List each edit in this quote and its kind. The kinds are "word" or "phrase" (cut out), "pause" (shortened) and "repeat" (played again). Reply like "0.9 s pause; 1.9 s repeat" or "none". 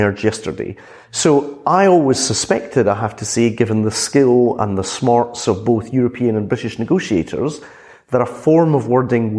none